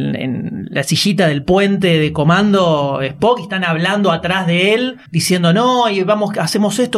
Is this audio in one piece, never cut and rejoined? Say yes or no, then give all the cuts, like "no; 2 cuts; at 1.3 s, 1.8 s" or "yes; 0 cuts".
no; 1 cut; at 5.1 s